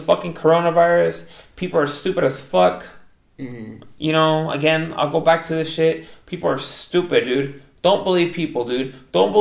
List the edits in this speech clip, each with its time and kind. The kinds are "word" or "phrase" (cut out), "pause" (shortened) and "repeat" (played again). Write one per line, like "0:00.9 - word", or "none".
none